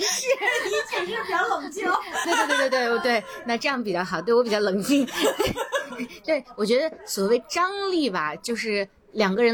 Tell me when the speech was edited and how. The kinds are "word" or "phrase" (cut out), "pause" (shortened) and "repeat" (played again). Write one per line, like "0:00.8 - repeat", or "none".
0:02.2 - word